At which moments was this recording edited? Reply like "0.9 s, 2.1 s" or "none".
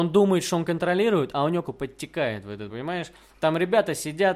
1.6 s, 2.7 s